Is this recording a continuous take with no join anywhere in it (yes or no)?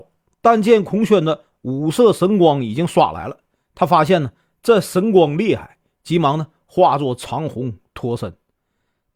yes